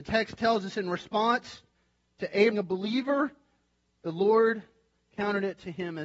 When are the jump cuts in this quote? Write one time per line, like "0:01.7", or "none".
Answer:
0:02.5

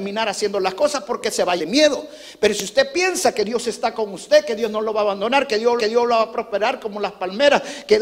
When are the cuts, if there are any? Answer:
0:01.6
0:05.8

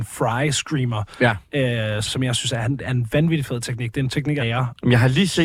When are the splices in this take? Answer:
0:02.0
0:04.4

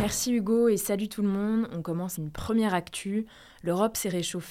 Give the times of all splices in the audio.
0:02.2

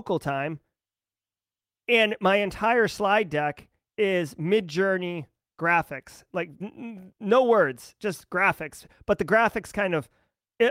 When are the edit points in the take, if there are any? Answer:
0:06.6

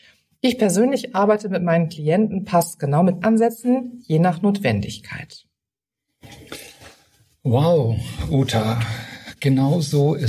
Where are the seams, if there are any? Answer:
0:03.2

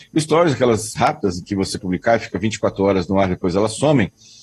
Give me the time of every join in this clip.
0:01.0
0:01.8

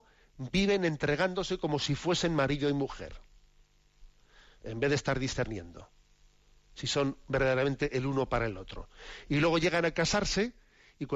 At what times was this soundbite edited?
none

